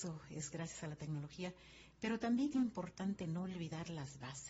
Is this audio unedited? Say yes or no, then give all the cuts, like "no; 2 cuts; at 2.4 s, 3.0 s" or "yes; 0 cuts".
no; 1 cut; at 2.5 s